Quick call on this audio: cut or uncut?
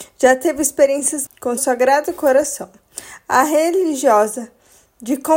cut